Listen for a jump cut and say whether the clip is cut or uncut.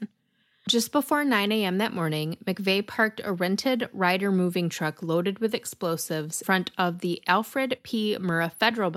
cut